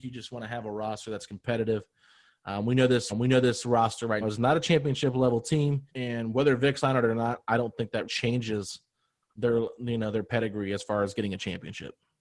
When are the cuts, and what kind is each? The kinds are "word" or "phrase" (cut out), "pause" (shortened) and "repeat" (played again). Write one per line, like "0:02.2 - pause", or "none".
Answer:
0:03.1 - repeat
0:04.2 - word
0:05.9 - pause
0:08.0 - word